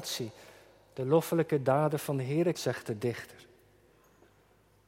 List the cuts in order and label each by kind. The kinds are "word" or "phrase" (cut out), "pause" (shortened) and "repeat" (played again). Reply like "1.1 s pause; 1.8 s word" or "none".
2.5 s word

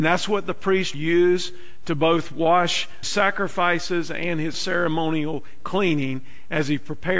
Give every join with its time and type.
0.9 s word; 3.0 s word; 4.5 s word

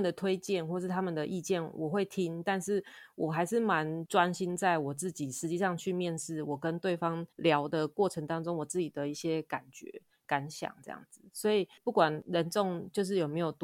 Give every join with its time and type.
7.3 s pause

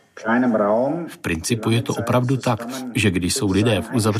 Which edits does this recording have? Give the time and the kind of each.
none

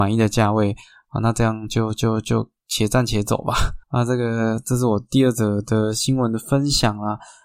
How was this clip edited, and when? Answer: 3.8 s pause

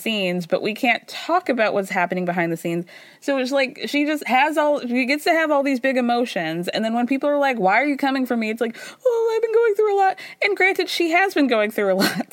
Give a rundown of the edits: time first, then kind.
none

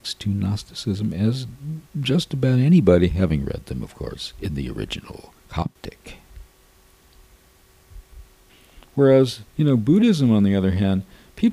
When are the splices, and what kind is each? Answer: 1.9 s pause; 5.4 s pause; 9.5 s pause

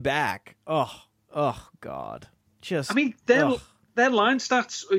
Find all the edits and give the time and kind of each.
none

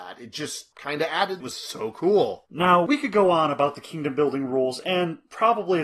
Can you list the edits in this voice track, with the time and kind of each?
1.4 s phrase

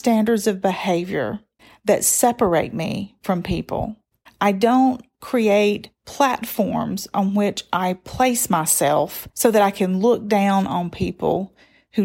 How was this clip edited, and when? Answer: 1.6 s pause; 4.3 s pause; 6.0 s pause; 9.3 s pause

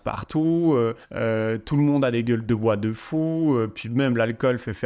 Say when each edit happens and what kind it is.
1.0 s pause

